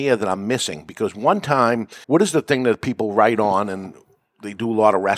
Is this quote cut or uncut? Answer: cut